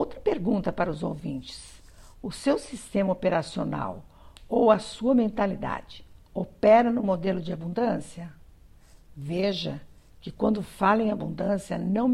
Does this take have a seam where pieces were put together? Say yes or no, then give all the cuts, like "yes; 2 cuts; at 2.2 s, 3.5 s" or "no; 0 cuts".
no; 0 cuts